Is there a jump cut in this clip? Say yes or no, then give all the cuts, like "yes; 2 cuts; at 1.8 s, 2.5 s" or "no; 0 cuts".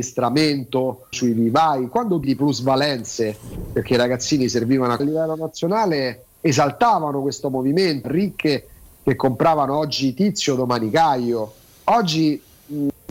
yes; 5 cuts; at 1.1 s, 2.2 s, 5.0 s, 6.3 s, 8.0 s